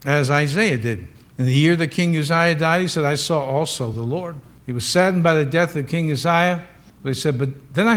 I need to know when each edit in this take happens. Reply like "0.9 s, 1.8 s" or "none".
none